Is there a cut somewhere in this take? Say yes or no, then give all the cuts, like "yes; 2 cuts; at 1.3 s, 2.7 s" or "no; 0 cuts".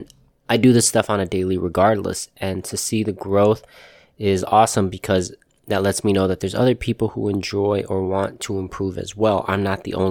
no; 0 cuts